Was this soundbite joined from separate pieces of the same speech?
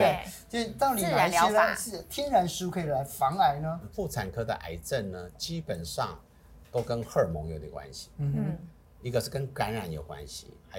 no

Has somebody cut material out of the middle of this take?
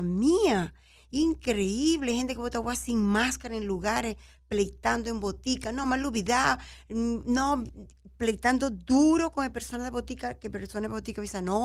no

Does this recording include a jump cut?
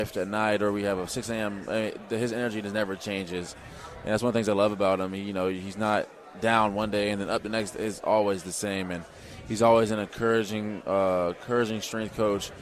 no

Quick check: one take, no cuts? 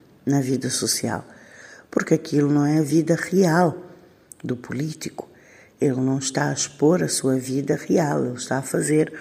yes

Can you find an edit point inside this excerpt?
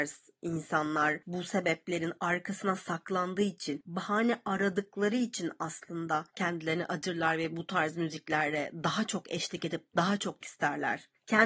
yes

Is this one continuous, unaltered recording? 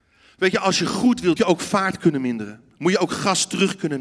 no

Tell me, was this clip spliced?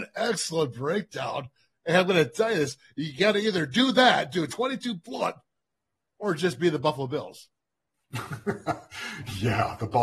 no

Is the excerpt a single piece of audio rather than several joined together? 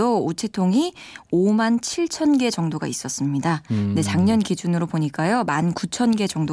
yes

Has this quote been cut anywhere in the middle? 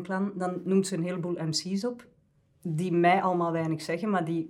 no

